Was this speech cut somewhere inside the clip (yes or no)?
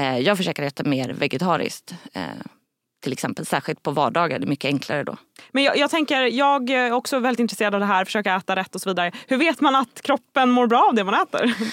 no